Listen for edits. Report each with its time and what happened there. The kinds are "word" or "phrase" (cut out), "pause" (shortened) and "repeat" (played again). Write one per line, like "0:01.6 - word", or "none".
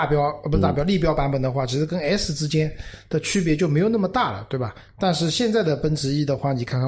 0:04.9 - pause